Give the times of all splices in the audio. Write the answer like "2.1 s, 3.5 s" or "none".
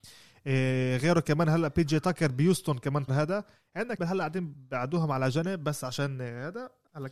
3.1 s, 4.0 s

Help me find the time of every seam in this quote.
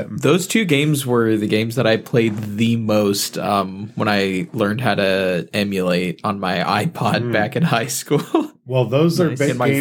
none

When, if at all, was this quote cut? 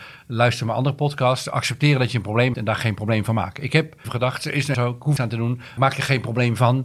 2.5 s, 4.0 s, 4.7 s, 5.2 s, 5.8 s

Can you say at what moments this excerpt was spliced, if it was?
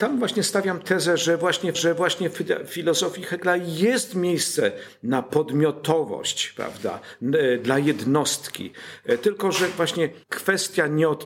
1.7 s, 10.2 s

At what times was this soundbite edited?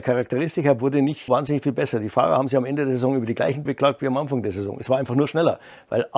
1.3 s, 3.7 s

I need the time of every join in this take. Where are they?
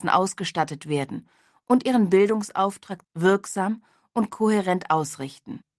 3.0 s

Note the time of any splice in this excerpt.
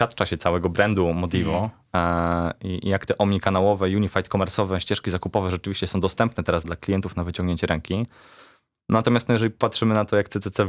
6.6 s

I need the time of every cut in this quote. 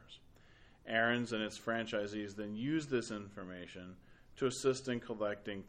none

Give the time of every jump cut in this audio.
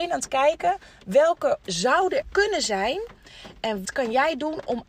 1.6 s, 2.2 s, 3.8 s

